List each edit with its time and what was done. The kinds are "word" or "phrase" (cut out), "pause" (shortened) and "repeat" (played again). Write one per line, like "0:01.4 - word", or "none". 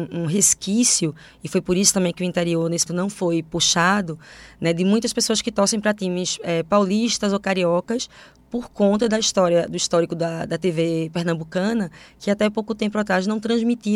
0:02.9 - word